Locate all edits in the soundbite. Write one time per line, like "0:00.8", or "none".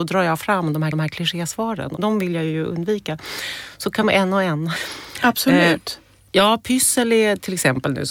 0:00.9
0:02.0
0:04.0